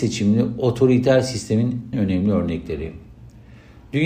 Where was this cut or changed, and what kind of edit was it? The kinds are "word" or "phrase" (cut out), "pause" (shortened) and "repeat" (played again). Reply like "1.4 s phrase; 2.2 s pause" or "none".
1.9 s word